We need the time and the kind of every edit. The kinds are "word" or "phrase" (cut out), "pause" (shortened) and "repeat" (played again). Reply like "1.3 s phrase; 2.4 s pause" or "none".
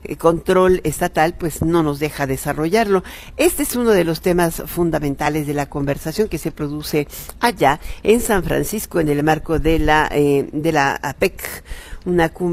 none